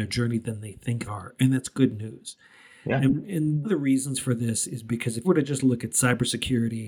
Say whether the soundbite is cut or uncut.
cut